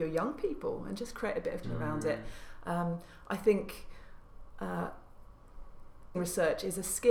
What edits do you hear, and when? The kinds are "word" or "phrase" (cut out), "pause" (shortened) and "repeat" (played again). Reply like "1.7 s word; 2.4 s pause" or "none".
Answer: 1.6 s word; 6.1 s word